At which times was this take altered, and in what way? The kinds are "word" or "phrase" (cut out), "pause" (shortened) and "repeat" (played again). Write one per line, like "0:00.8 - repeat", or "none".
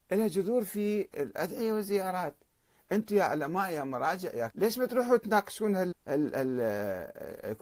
0:04.5 - word
0:05.9 - word